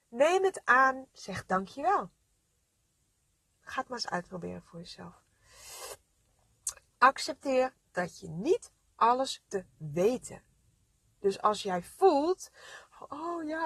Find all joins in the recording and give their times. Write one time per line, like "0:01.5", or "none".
0:01.1
0:09.5